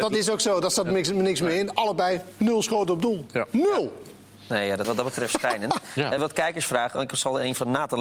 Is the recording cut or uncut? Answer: cut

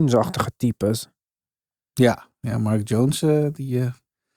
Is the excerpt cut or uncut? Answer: uncut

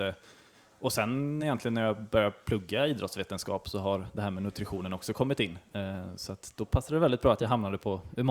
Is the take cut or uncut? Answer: uncut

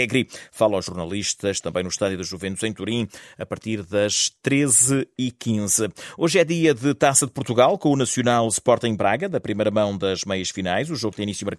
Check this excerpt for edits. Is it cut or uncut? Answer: uncut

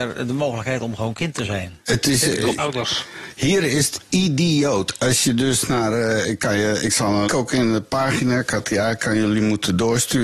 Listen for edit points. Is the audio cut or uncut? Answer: cut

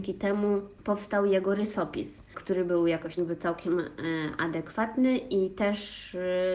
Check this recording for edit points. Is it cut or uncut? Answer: cut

